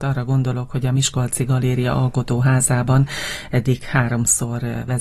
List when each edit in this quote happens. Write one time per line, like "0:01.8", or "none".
none

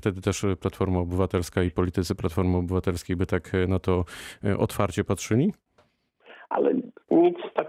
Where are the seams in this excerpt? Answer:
none

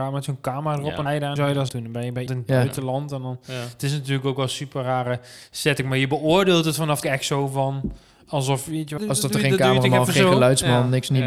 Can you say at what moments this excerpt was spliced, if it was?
0:01.1
0:01.4
0:01.7
0:02.3
0:07.0
0:09.0

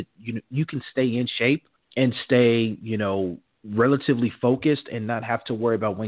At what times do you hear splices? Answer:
0:01.8

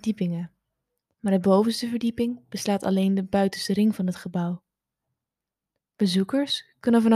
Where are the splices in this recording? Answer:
none

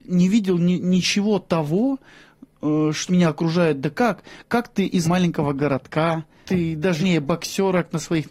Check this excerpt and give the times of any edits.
0:03.1
0:05.0
0:06.5
0:07.0

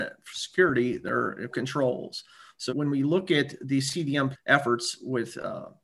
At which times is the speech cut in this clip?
0:01.5
0:02.7
0:04.3

